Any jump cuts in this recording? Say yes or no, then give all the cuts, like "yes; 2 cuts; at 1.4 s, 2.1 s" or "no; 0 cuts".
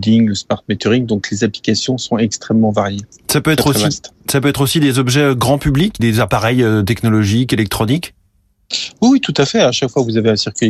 yes; 1 cut; at 6.0 s